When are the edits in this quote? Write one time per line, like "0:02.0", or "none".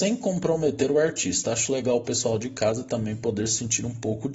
none